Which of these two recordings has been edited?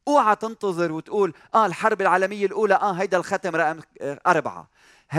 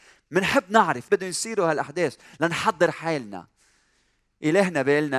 second; 1 cut; at 1.1 s

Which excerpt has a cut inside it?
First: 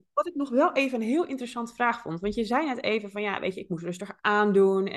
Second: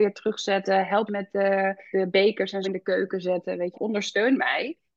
second; 4 cuts; at 1.1 s, 1.9 s, 2.6 s, 3.7 s

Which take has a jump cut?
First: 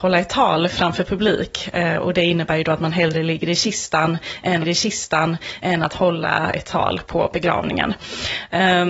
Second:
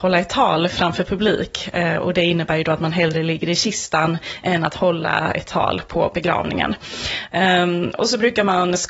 first; 1 cut; at 4.6 s

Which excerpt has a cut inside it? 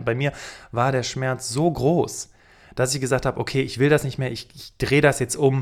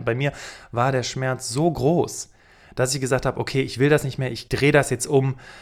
second; 1 cut; at 4.5 s

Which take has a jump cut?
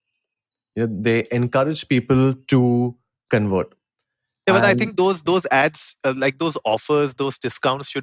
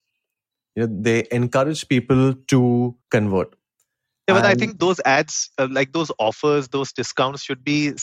second; 2 cuts; at 3.0 s, 4.8 s

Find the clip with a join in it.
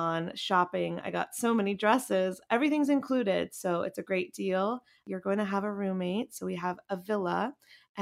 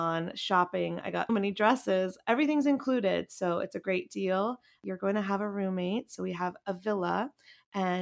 second; 1 cut; at 1.3 s

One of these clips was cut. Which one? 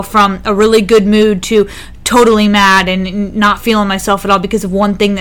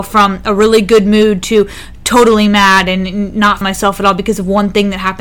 second; 1 cut; at 3.6 s

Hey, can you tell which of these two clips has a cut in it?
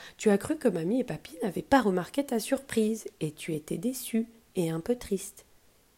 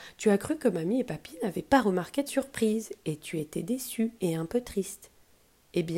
second; 2 cuts; at 2.3 s, 4.2 s

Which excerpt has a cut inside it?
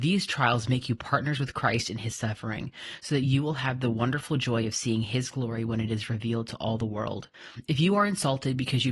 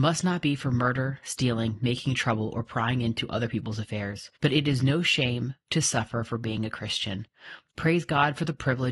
second; 1 cut; at 4.3 s

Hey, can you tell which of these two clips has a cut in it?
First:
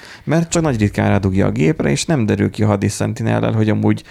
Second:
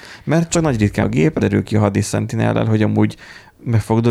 second; 2 cuts; at 1.0 s, 1.4 s

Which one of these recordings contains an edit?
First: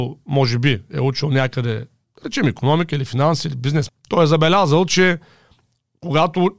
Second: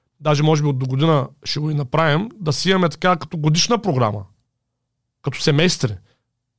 first; 1 cut; at 3.9 s

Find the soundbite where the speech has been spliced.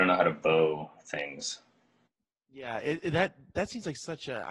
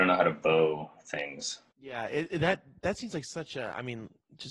second; 1 cut; at 1.7 s

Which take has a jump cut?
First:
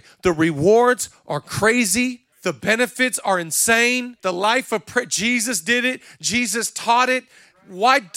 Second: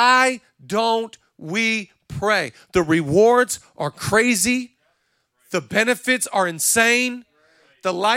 first; 2 cuts; at 2.3 s, 4.2 s

